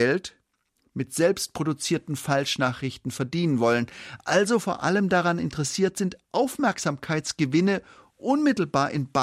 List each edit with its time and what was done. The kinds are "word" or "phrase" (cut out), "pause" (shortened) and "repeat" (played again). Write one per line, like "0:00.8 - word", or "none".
none